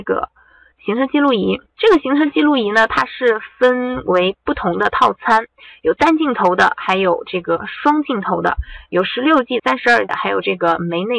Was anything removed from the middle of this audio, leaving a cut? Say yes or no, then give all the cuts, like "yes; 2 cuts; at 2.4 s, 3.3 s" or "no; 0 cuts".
yes; 3 cuts; at 1.7 s, 9.6 s, 10.1 s